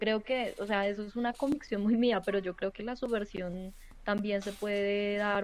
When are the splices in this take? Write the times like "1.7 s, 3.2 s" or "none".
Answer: none

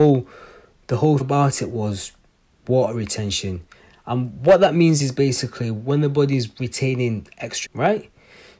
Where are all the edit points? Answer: 1.2 s, 5.0 s, 7.6 s

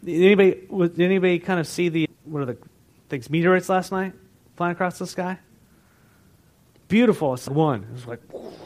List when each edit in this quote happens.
2.0 s, 7.5 s

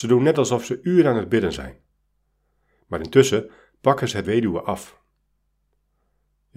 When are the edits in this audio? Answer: 4.2 s

